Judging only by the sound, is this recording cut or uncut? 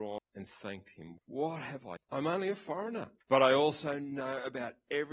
cut